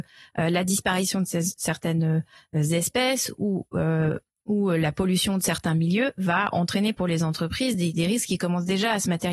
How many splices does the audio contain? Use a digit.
0